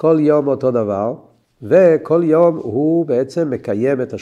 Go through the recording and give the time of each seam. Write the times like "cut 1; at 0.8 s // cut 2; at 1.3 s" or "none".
none